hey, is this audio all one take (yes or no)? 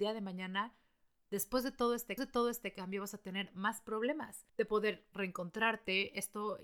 no